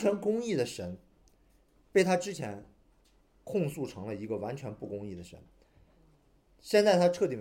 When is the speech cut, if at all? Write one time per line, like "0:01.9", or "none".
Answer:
none